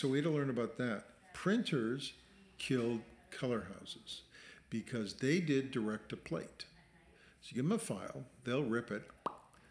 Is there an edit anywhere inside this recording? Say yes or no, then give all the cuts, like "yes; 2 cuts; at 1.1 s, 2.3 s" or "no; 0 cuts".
no; 0 cuts